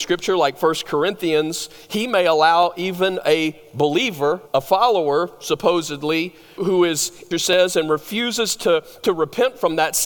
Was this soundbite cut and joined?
yes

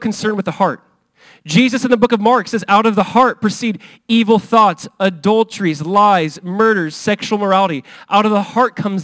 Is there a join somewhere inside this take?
no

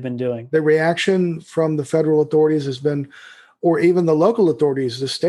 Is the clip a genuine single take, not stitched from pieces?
yes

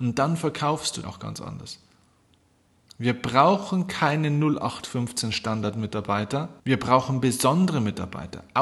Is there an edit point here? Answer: yes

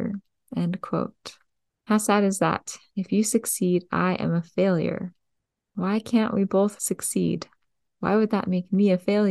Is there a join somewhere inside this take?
no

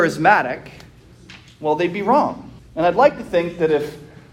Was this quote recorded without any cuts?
no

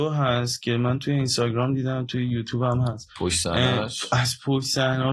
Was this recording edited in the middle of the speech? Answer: no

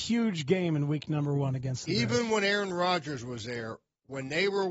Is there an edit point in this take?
no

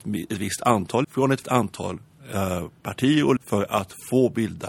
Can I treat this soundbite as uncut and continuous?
no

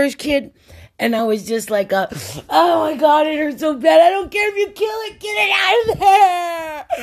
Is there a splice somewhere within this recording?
no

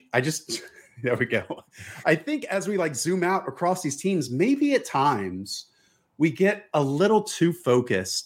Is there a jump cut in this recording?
no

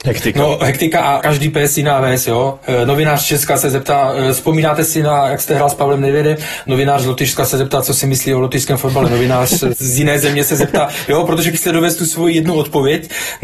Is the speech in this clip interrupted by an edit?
yes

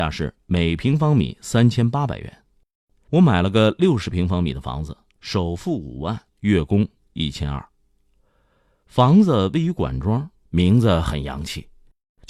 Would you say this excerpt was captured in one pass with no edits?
no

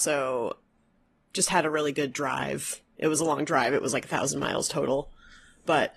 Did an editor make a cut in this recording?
no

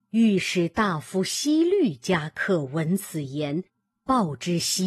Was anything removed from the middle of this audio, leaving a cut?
no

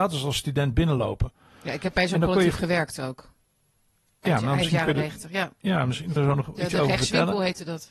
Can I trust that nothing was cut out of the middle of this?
no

